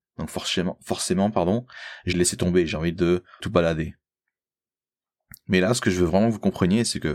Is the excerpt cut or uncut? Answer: cut